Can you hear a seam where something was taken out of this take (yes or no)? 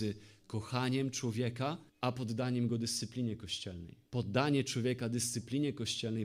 yes